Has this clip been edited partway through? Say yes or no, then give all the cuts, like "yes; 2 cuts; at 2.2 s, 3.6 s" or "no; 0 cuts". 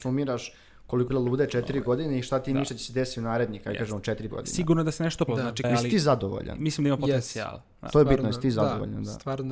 yes; 4 cuts; at 1.1 s, 4.3 s, 5.3 s, 5.6 s